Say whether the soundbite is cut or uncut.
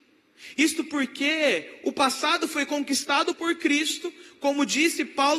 uncut